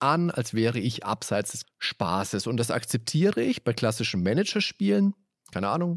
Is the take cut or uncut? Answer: cut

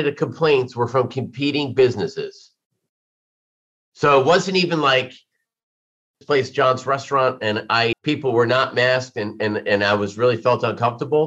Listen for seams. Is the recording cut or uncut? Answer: cut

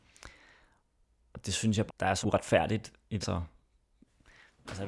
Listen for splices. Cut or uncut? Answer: cut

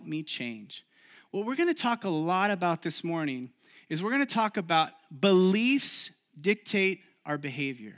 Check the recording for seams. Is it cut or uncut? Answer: uncut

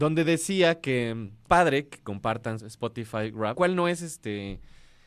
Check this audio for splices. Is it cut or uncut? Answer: cut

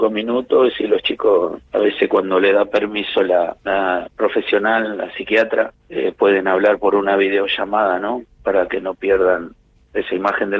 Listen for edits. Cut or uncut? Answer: cut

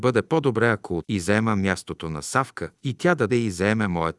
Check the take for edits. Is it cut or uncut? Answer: cut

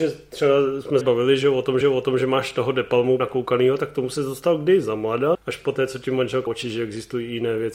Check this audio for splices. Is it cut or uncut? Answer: cut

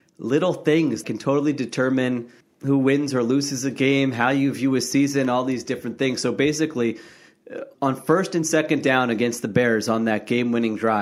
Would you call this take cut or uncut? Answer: cut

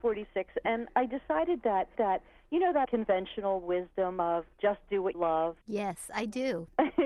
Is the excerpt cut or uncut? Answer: cut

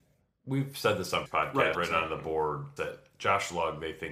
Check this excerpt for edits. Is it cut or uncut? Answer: cut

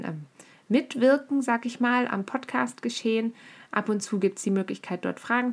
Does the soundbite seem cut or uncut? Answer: uncut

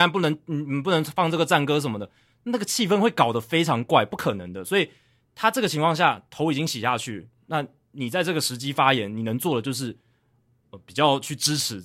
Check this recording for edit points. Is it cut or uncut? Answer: uncut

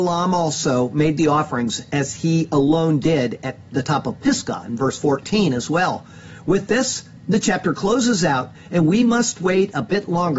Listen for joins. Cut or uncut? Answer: uncut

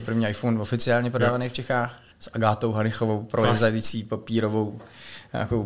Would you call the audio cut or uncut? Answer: cut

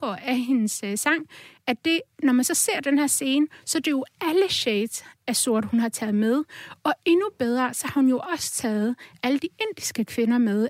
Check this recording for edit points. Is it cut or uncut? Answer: uncut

